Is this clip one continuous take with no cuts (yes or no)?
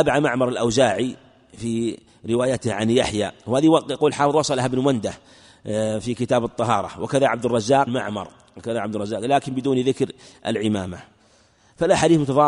no